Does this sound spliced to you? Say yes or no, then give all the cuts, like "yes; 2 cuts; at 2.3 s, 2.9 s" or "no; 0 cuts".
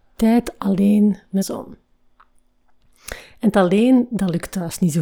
yes; 2 cuts; at 1.4 s, 3.5 s